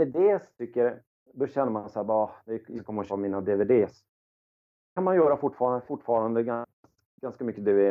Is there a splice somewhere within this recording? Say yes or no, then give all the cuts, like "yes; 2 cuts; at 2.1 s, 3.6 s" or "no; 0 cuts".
yes; 4 cuts; at 2.8 s, 3.1 s, 5.0 s, 5.9 s